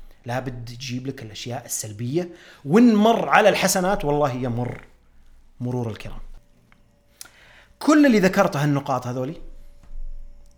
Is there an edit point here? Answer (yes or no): no